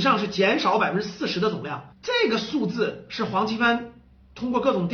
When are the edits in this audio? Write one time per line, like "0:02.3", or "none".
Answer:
0:01.9